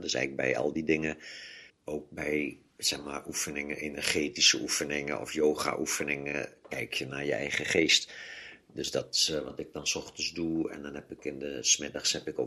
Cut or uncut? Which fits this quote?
cut